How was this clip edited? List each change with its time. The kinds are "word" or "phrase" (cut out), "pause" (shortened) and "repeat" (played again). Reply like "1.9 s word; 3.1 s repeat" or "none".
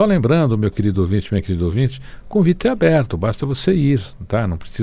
none